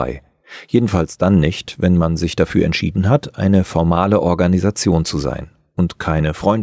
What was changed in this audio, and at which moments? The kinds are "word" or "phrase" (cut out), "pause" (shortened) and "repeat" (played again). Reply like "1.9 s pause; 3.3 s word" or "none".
none